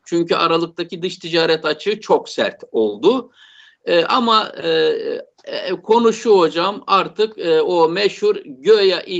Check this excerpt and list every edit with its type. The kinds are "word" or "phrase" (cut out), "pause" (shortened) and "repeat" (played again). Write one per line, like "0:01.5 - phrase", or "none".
none